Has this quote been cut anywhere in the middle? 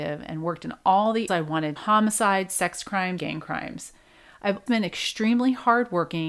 yes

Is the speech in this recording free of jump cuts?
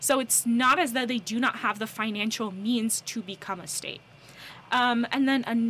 yes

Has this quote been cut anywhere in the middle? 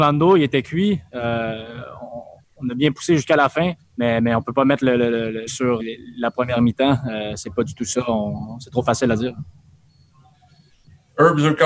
yes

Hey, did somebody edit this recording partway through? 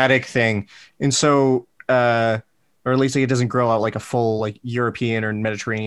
no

